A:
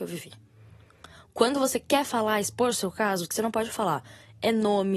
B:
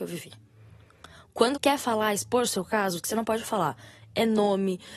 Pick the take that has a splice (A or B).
B